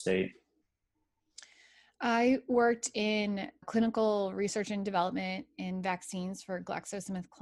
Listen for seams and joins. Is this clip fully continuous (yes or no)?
no